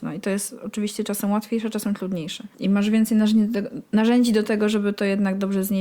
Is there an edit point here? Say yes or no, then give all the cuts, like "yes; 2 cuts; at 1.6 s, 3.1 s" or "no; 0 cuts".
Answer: yes; 1 cut; at 2.5 s